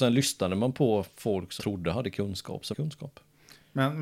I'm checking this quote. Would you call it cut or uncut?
cut